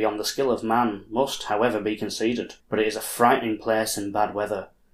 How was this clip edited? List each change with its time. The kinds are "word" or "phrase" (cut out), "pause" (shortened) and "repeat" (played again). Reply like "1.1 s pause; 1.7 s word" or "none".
2.6 s pause

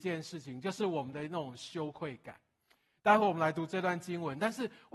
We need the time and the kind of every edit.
none

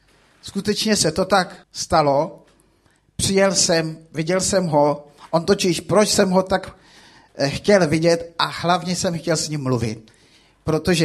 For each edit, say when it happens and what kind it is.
1.6 s pause

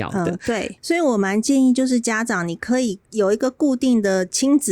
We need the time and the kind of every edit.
3.0 s pause

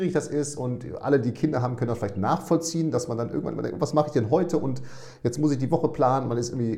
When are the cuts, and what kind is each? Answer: none

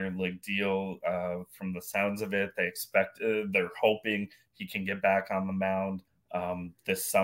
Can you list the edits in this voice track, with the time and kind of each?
6.1 s pause

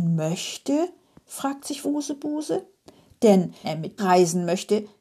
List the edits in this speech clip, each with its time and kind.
1.8 s word; 3.6 s word; 4.0 s word

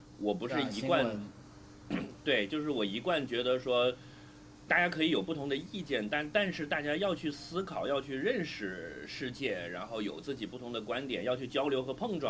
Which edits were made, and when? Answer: 4.7 s word

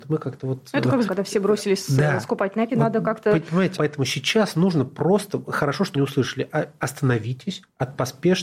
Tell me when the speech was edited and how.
1.1 s word; 2.7 s word; 3.8 s word; 5.9 s word

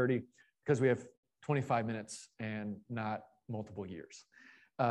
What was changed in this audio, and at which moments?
none

